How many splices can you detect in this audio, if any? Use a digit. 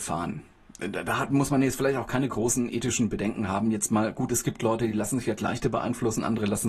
0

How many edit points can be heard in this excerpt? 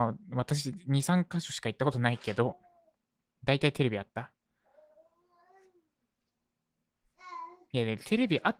0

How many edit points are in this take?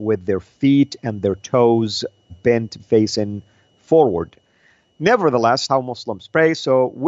3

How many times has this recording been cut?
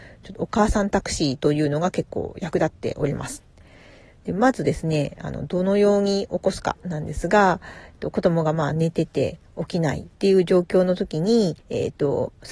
2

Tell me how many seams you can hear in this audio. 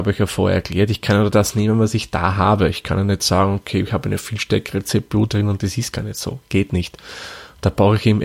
0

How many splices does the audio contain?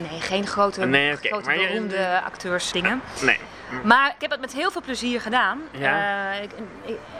2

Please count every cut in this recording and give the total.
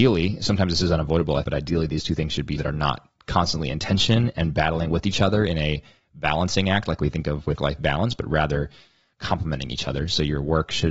3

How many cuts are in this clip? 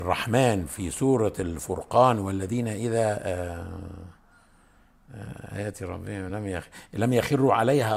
0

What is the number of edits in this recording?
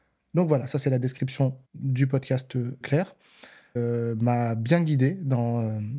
3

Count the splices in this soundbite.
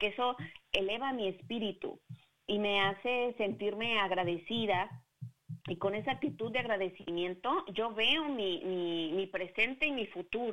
1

